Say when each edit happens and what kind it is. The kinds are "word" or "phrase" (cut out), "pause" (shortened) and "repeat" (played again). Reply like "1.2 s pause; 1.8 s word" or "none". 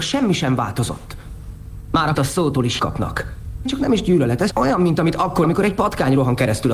2.1 s word; 2.8 s word; 3.6 s word; 4.5 s word; 5.4 s word